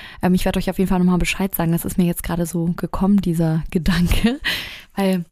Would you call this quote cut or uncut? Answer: uncut